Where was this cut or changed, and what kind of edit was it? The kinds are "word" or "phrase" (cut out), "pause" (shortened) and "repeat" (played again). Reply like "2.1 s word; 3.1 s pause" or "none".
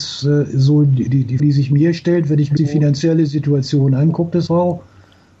1.1 s word; 1.4 s word; 2.6 s word; 4.5 s word

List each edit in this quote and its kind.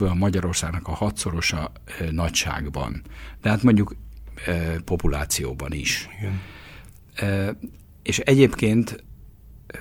none

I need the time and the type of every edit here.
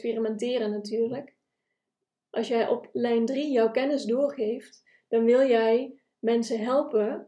none

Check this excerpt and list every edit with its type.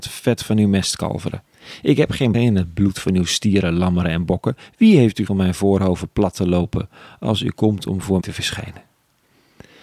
2.3 s word; 5.3 s word; 8.2 s word

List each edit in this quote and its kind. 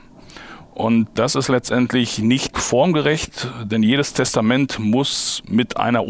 1.2 s word

